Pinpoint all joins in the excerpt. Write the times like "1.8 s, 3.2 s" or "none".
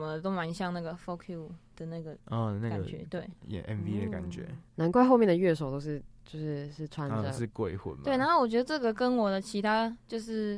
2.2 s, 4.7 s